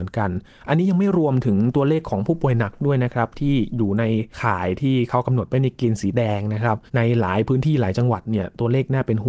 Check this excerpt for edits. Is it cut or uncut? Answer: cut